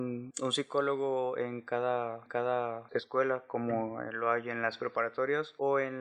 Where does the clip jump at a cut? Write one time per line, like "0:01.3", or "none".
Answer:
0:02.3